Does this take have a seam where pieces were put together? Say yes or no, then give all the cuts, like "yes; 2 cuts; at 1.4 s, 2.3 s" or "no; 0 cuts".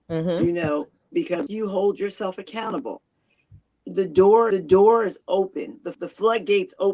yes; 3 cuts; at 1.5 s, 4.5 s, 5.9 s